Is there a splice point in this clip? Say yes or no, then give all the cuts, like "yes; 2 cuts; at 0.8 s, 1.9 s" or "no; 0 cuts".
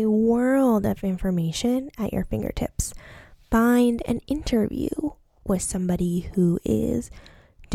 no; 0 cuts